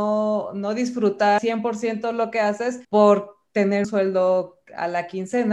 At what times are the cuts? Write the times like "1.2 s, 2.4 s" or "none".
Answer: 1.4 s, 2.8 s, 3.8 s